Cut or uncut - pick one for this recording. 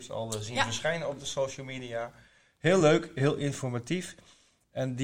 uncut